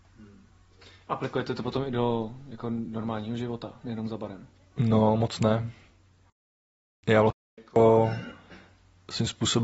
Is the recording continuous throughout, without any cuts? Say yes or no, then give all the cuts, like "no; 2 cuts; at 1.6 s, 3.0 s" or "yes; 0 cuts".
yes; 0 cuts